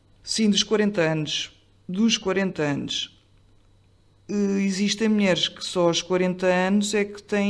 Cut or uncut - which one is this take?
uncut